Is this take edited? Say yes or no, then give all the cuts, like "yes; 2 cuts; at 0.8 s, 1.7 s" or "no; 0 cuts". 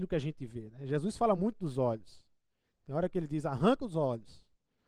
no; 0 cuts